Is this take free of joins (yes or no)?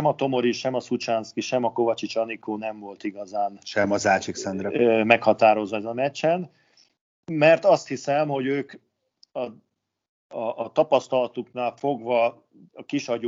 yes